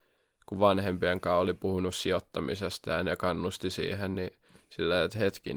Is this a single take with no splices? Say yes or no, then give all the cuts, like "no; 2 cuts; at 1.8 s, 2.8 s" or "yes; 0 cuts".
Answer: yes; 0 cuts